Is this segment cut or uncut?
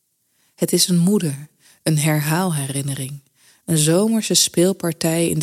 uncut